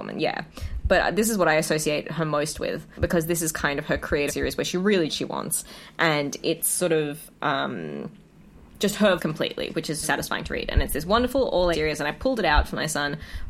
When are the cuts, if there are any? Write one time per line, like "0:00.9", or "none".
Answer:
0:03.0
0:04.3
0:05.1
0:08.3
0:09.2
0:10.0
0:11.7